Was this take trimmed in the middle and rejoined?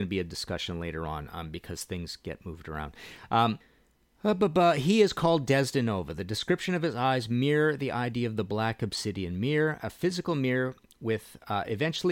no; 0 cuts

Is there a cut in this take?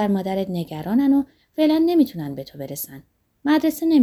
no; 0 cuts

